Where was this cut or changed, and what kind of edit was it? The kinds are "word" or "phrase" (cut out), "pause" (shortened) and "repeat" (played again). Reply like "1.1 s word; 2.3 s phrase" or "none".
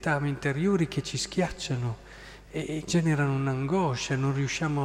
2.9 s word